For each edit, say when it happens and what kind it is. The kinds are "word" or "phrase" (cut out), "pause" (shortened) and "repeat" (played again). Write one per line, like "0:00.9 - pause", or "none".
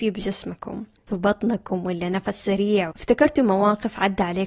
0:01.1 - word
0:02.9 - word